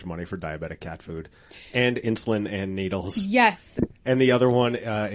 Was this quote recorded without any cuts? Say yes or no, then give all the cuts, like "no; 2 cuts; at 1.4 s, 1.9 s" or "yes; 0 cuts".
yes; 0 cuts